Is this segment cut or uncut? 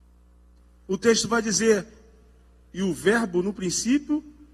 uncut